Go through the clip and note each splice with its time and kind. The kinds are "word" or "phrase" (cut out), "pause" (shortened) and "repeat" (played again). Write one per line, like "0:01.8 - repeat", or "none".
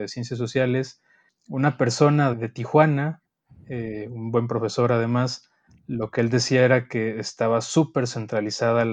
0:02.3 - word